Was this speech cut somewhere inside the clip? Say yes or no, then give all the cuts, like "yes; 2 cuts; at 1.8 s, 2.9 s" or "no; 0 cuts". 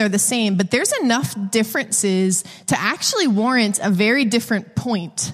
no; 0 cuts